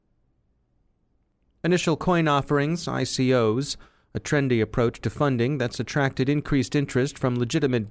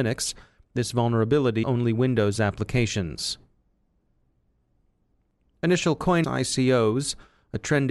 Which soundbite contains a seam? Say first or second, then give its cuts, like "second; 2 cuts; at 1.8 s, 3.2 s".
second; 2 cuts; at 1.6 s, 6.2 s